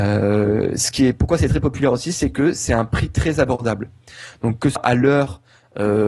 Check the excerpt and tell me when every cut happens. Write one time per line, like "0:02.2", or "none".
0:04.8